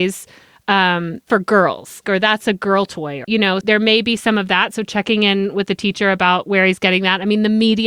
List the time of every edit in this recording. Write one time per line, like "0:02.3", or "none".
0:01.3
0:02.0
0:03.2
0:03.6